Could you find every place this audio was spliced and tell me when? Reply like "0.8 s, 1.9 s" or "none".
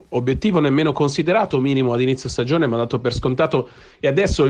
none